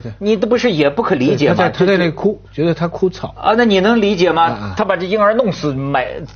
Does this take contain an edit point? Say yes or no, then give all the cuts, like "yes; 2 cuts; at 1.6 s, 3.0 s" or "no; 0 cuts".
yes; 1 cut; at 2.4 s